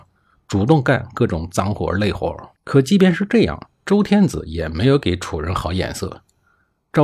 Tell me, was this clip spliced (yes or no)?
yes